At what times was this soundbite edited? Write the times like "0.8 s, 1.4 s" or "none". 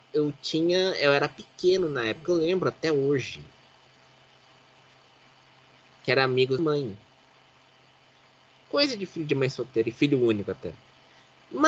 6.6 s